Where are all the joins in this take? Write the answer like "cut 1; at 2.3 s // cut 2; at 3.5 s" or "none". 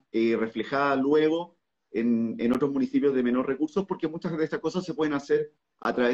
none